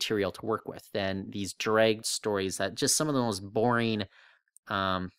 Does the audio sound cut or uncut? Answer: cut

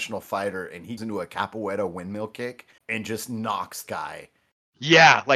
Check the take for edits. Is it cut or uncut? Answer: cut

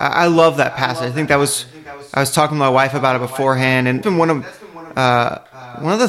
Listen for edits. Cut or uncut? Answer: cut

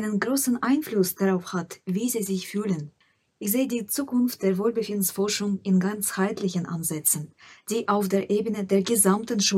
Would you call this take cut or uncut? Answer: uncut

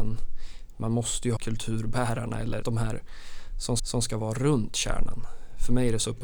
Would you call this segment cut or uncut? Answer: cut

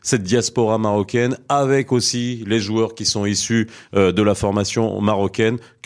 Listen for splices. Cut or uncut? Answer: uncut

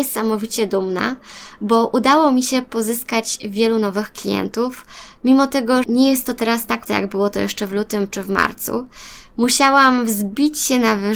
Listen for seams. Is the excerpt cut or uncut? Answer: cut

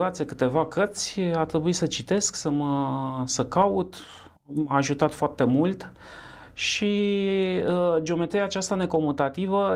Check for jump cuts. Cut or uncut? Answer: cut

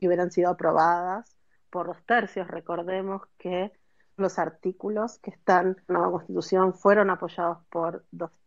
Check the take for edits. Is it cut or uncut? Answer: cut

